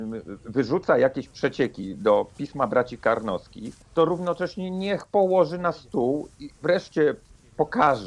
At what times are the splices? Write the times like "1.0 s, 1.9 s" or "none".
3.8 s